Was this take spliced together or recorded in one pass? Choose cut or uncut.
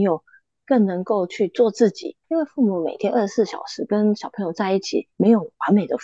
cut